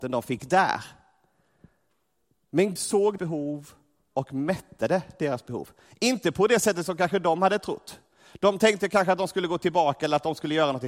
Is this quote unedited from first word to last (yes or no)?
no